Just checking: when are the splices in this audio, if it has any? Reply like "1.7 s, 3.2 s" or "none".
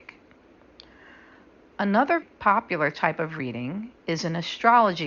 2.2 s, 4.0 s